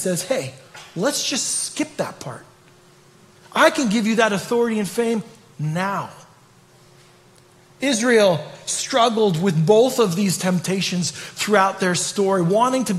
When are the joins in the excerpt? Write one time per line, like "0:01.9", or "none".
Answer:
none